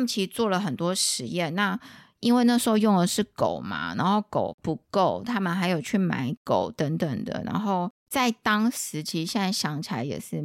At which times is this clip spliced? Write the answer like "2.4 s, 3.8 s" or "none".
8.0 s